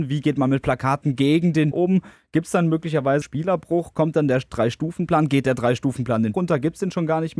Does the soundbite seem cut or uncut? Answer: cut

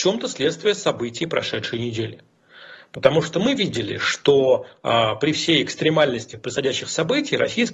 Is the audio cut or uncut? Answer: uncut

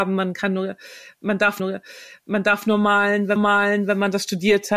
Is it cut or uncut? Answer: cut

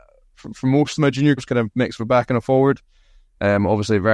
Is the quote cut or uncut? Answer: cut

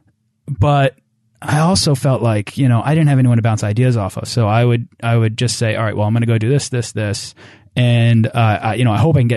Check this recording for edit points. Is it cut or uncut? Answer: uncut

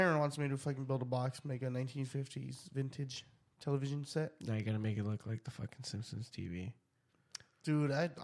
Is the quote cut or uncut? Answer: uncut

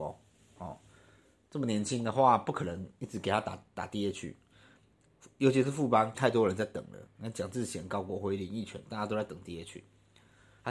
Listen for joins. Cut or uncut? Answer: cut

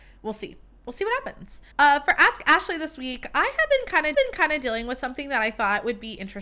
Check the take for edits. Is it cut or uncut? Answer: cut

